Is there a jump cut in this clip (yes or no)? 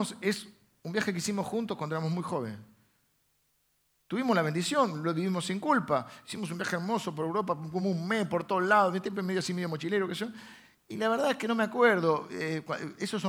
no